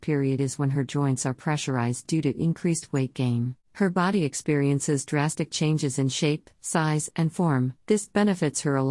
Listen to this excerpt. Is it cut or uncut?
cut